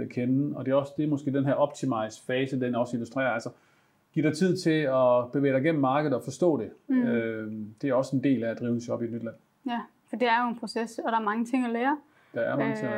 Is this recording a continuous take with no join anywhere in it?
yes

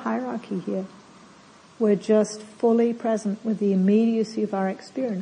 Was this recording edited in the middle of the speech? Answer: no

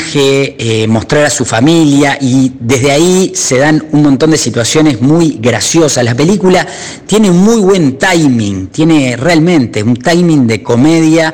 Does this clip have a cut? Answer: no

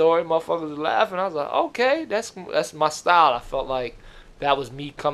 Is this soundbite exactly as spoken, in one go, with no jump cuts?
yes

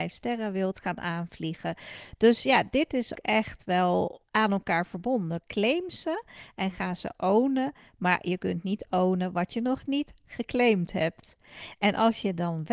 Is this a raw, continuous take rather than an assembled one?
no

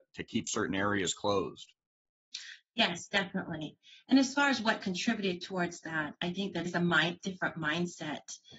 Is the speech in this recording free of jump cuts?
no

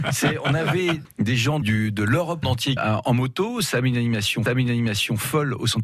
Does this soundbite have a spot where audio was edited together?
yes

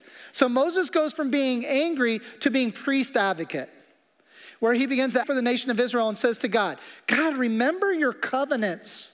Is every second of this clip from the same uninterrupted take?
no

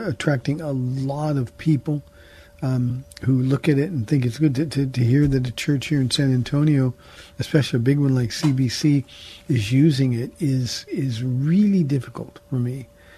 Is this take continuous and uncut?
yes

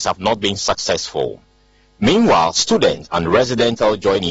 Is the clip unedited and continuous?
yes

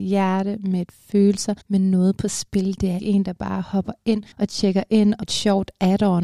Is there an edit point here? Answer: yes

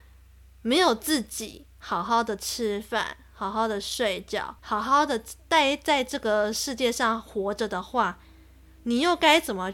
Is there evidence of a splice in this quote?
yes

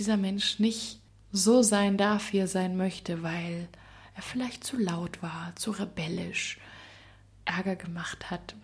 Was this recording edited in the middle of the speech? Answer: yes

